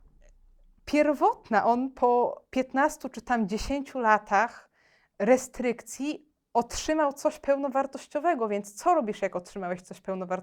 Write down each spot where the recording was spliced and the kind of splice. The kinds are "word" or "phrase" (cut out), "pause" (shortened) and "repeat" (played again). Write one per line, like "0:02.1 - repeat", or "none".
none

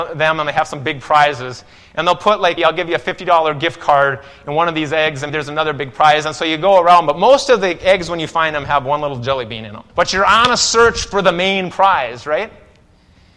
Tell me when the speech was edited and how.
0:02.6 - word
0:05.3 - word
0:09.9 - pause

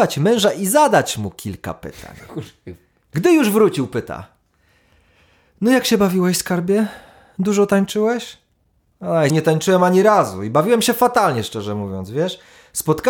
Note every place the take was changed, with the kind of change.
0:09.3 - word

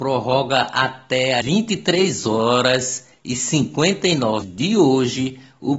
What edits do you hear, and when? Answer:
0:01.4 - word
0:04.4 - word

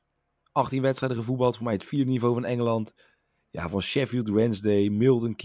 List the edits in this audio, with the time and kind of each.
none

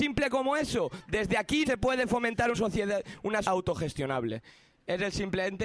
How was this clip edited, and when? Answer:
0:01.6 - word
0:02.5 - word
0:03.4 - word

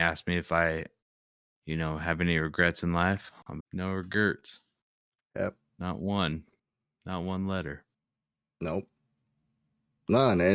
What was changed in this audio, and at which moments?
0:03.6 - word

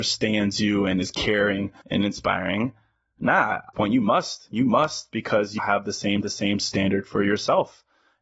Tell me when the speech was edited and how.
0:01.8 - pause
0:03.7 - phrase
0:05.6 - word
0:06.2 - repeat

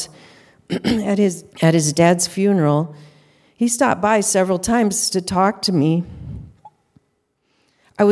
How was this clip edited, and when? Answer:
0:01.5 - pause

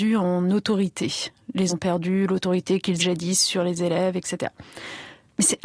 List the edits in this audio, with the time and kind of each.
0:01.7 - word
0:03.0 - word

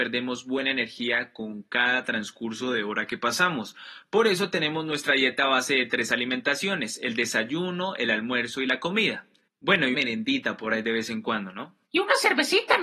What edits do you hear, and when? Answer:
0:09.5 - pause
0:09.9 - word
0:11.8 - pause

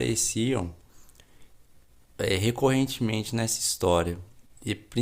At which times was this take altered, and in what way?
none

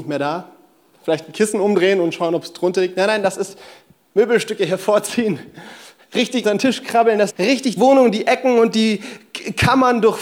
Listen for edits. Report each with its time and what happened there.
0:06.4 - word
0:07.3 - word
0:07.8 - word

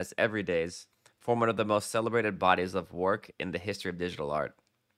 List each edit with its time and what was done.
none

